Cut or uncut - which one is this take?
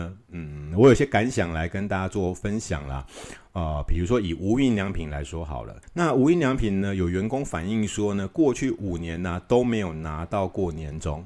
cut